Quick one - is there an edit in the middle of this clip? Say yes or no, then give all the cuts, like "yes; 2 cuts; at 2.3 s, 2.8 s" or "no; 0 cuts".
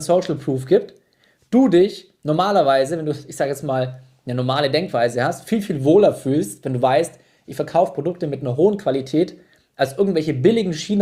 no; 0 cuts